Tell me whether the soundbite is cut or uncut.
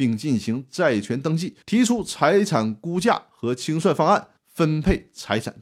cut